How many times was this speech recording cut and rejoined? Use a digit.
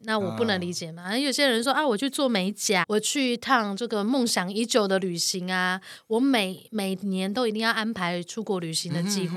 1